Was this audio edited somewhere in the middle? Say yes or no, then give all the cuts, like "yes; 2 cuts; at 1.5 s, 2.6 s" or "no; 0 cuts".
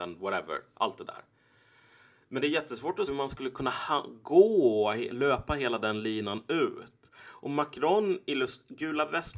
yes; 1 cut; at 3.1 s